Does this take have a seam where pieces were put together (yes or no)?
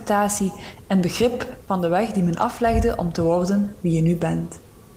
no